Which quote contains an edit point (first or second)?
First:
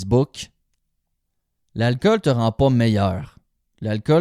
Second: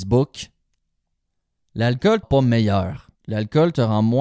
second